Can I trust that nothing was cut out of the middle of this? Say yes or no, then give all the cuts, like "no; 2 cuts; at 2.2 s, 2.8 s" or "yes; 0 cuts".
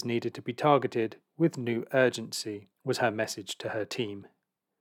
no; 1 cut; at 2.7 s